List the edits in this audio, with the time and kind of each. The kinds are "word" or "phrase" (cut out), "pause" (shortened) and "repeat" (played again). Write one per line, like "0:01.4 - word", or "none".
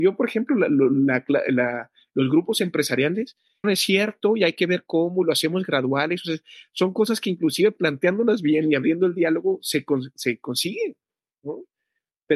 0:03.6 - word